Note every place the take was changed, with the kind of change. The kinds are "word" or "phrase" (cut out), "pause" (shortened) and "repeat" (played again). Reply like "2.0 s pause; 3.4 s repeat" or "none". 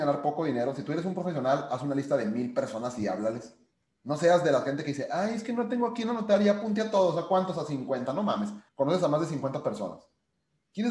3.7 s pause; 8.7 s pause